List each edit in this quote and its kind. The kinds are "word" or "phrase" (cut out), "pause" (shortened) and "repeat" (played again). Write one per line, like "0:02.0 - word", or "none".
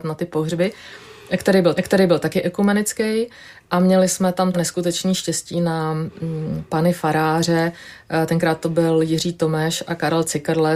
0:01.8 - repeat
0:04.5 - word